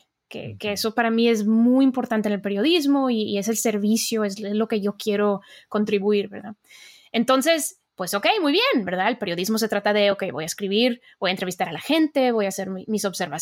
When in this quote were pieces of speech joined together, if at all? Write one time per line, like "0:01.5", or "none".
none